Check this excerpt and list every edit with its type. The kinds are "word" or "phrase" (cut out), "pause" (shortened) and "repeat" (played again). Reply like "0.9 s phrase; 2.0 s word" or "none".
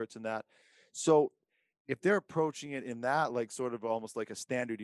none